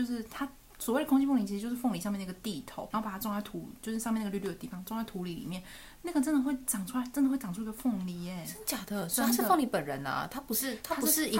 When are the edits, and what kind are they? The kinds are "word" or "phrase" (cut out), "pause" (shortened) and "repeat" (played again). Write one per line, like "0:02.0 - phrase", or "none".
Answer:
0:02.9 - word